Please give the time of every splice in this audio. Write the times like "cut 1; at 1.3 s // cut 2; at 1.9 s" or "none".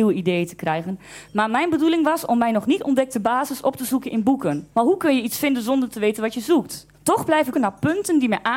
cut 1; at 4.7 s // cut 2; at 6.9 s // cut 3; at 7.5 s